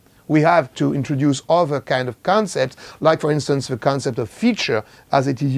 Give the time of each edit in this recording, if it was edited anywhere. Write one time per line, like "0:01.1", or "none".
none

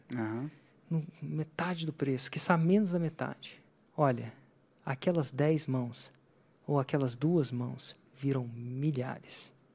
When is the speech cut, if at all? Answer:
none

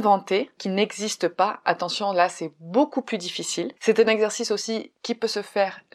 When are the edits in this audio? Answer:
0:03.8

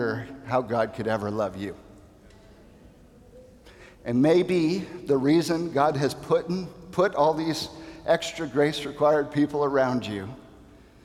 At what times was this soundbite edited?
none

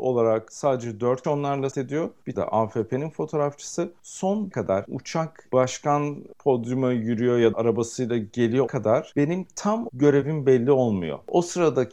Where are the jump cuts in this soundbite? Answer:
0:01.2
0:01.7
0:02.3
0:04.5
0:04.8
0:05.5
0:07.5
0:08.7
0:09.9

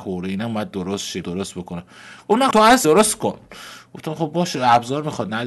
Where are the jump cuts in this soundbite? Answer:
0:01.2
0:02.5
0:02.8

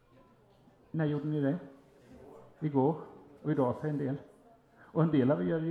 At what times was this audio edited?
none

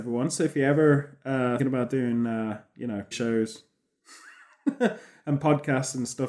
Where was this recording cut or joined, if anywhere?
0:01.6
0:03.1

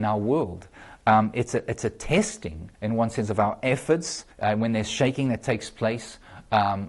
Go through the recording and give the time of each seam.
0:02.7
0:04.3

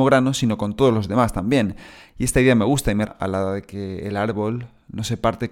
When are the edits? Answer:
0:03.1

